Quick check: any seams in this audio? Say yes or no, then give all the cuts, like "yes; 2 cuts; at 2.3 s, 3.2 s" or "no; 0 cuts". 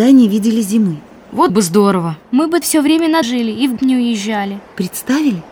yes; 4 cuts; at 1.5 s, 2.6 s, 3.2 s, 3.8 s